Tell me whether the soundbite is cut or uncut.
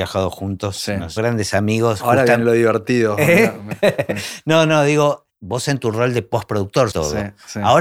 cut